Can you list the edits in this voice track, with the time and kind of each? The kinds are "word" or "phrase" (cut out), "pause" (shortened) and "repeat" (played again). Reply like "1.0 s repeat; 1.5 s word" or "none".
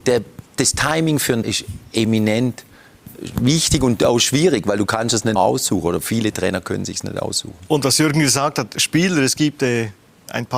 1.4 s word; 5.4 s word